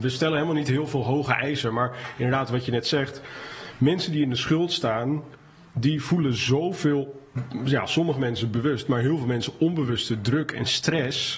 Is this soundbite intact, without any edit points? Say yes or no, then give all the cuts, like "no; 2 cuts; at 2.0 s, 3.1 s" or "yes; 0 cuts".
yes; 0 cuts